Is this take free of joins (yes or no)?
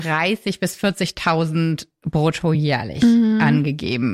yes